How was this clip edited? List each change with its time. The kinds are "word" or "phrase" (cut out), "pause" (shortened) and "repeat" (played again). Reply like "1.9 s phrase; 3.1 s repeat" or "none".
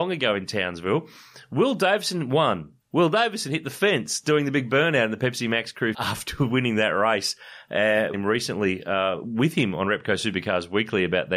2.8 s pause; 5.9 s phrase; 8.1 s phrase